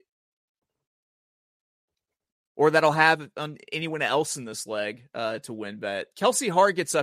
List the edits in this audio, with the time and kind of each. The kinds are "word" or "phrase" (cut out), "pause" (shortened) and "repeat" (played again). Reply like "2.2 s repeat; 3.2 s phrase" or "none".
none